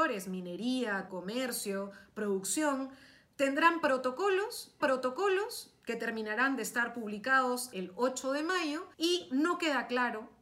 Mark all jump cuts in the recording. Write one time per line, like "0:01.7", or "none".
0:01.1
0:04.8
0:07.7
0:08.9